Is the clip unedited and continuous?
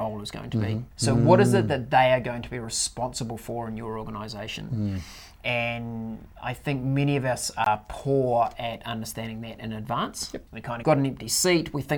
no; 4 cuts; at 0.9 s, 6.3 s, 10.5 s, 10.8 s

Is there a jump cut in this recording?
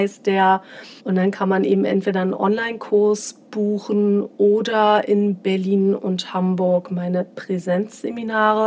yes; 1 cut; at 1.0 s

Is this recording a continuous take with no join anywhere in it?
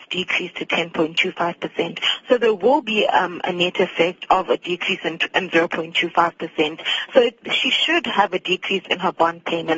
yes; 0 cuts

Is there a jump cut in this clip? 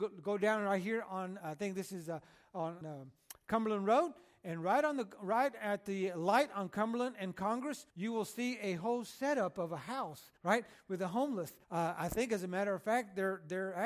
yes; 5 cuts; at 1.4 s, 2.8 s, 7.9 s, 10.4 s, 11.6 s

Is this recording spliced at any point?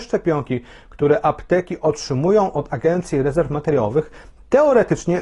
no; 0 cuts

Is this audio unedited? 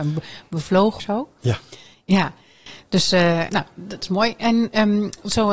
no; 3 cuts; at 1.0 s, 3.5 s, 4.0 s

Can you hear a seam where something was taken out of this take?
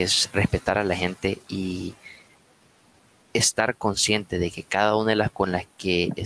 yes; 1 cut; at 5.3 s

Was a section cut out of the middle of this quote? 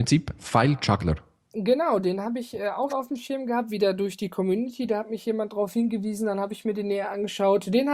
yes; 1 cut; at 2.9 s

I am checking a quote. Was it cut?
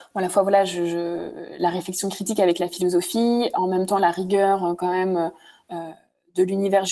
no; 0 cuts

